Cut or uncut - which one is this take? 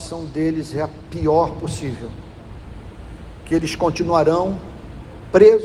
uncut